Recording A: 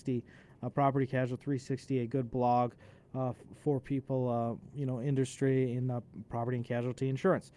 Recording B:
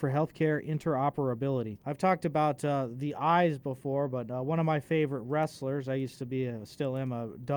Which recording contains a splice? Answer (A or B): B